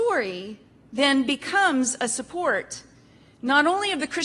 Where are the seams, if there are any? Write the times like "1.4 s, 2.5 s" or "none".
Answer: none